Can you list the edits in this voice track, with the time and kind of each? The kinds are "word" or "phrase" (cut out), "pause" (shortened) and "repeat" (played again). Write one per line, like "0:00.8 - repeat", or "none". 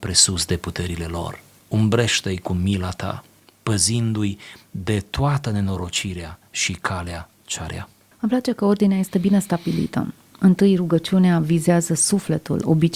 none